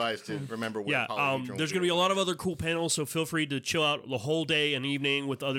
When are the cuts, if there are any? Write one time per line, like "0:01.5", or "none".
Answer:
none